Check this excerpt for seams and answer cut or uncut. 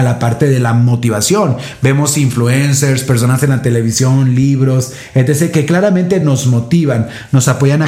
uncut